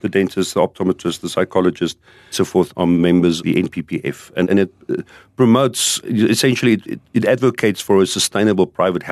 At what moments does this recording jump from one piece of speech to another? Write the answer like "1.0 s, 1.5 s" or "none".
2.3 s, 2.7 s, 3.4 s, 4.4 s, 6.0 s, 6.8 s